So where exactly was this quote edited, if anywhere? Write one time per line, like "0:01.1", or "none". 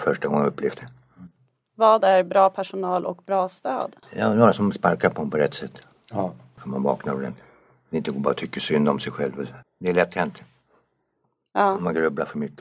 none